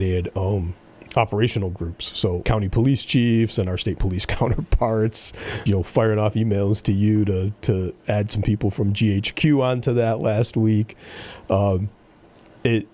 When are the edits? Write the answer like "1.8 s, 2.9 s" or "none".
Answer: 2.4 s, 5.7 s